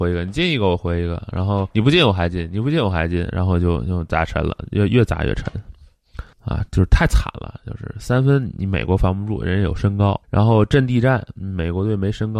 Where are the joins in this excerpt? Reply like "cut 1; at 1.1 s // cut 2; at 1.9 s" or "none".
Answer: cut 1; at 1.7 s // cut 2; at 6.3 s // cut 3; at 10.2 s